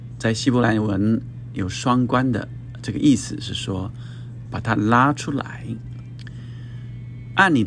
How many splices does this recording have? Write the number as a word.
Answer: one